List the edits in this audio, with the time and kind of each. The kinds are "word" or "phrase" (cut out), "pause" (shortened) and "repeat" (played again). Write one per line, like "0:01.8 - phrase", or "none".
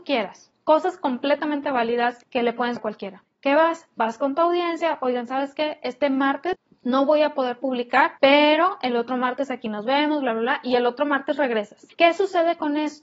0:02.2 - pause
0:02.8 - word
0:08.2 - pause
0:11.9 - pause